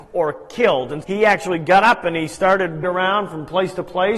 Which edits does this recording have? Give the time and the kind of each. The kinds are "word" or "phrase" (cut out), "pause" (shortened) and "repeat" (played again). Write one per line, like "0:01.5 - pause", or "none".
0:01.0 - word
0:02.8 - word